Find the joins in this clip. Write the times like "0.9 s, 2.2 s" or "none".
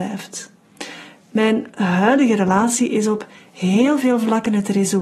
none

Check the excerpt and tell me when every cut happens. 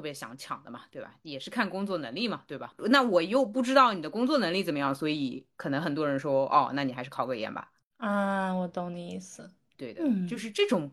none

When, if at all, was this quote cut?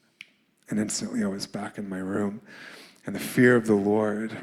none

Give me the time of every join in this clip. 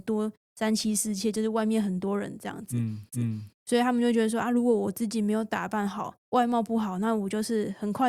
3.1 s, 6.2 s

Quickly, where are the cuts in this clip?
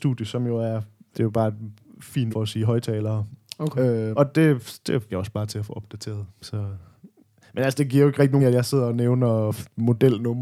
1.1 s, 2.3 s, 4.1 s, 5.1 s, 8.4 s

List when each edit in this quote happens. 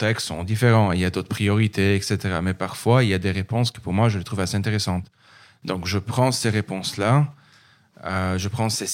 none

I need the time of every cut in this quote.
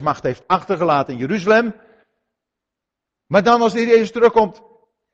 none

